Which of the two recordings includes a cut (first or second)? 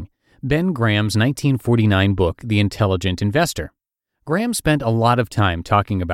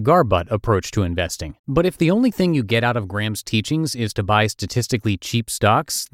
second